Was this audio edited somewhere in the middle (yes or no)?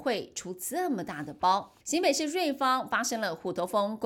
yes